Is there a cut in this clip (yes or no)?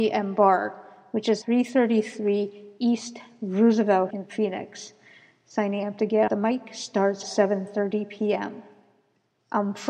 yes